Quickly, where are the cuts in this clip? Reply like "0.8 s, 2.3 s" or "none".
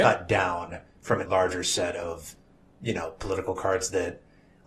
1.3 s